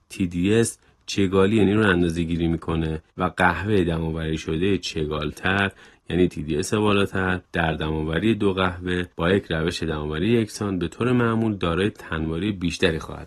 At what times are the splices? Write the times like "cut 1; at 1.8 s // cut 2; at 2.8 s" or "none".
cut 1; at 1.6 s // cut 2; at 3.1 s // cut 3; at 6.3 s // cut 4; at 7.4 s // cut 5; at 9.1 s